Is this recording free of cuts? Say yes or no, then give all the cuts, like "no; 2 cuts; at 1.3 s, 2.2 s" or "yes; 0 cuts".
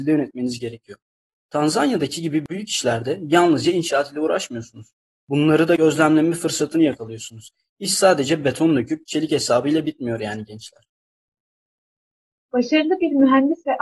yes; 0 cuts